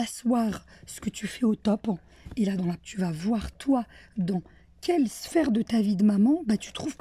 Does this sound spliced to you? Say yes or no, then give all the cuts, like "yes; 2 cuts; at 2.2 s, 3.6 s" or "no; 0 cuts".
yes; 1 cut; at 2.8 s